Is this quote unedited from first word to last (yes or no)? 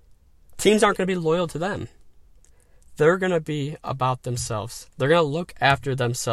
yes